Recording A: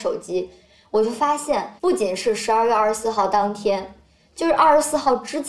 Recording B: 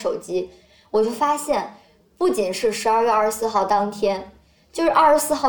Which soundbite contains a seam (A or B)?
A